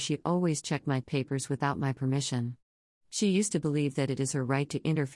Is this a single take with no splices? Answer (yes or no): no